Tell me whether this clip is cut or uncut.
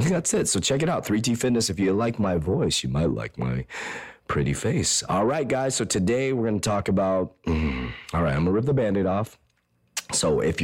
uncut